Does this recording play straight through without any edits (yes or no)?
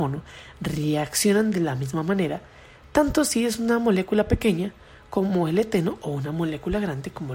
yes